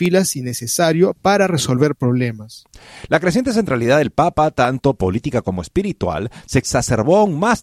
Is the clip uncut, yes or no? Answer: yes